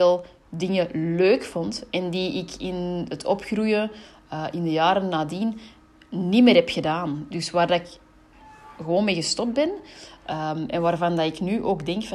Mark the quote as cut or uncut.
uncut